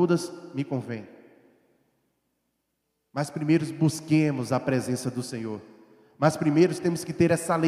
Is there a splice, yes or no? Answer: no